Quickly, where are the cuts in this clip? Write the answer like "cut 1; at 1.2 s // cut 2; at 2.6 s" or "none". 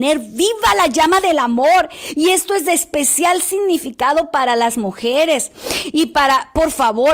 none